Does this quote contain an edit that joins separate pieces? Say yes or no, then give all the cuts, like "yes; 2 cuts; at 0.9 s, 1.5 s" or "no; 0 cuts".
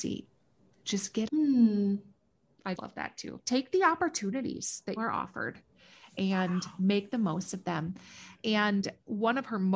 yes; 4 cuts; at 1.3 s, 2.7 s, 3.4 s, 5.0 s